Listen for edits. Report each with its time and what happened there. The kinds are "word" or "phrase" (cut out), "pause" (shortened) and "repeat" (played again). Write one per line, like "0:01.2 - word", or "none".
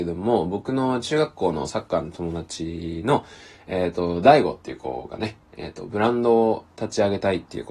none